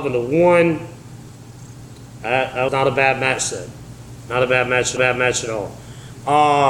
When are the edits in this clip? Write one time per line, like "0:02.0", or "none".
0:02.7
0:05.0